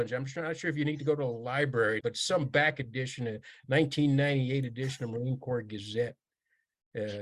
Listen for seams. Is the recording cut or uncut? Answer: cut